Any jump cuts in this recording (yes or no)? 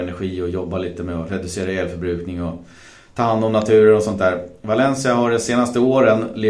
no